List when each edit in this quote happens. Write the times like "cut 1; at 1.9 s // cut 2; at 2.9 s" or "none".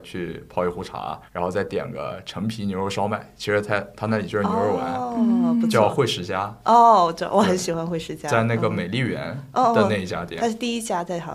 cut 1; at 1.3 s